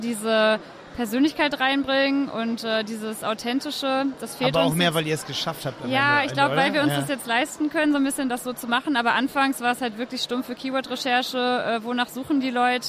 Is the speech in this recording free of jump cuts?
yes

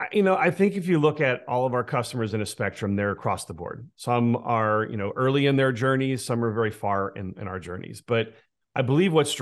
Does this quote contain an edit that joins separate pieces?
no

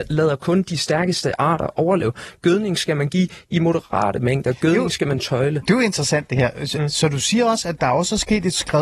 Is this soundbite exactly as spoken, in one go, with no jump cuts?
yes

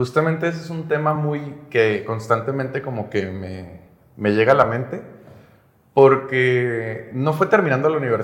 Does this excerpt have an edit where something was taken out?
no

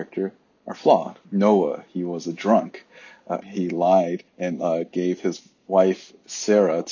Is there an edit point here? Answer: yes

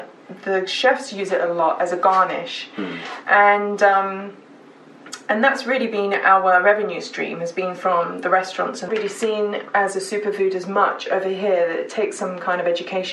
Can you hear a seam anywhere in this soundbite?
yes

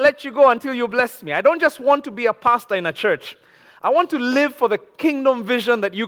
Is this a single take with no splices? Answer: yes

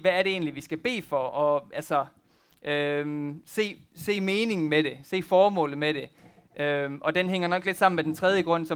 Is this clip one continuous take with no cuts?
yes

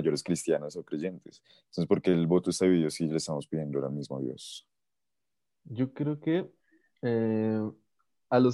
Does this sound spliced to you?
no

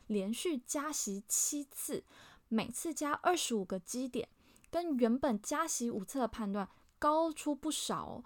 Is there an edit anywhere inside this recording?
no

